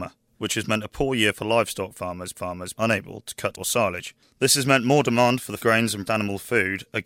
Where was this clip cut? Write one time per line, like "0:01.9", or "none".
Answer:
0:02.3
0:03.5
0:05.6
0:06.1